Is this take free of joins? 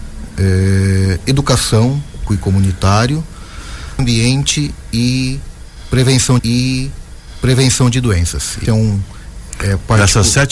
no; 4 cuts; at 2.3 s, 4.0 s, 6.4 s, 8.6 s

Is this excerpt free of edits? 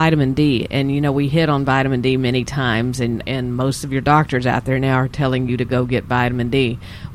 yes; 0 cuts

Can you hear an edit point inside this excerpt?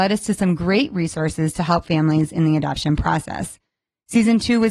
no; 0 cuts

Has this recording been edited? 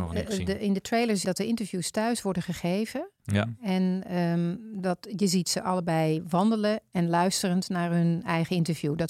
yes; 1 cut; at 1.2 s

